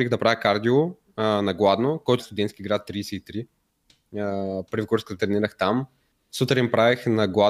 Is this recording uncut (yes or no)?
no